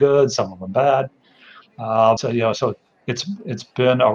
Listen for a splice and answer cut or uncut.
cut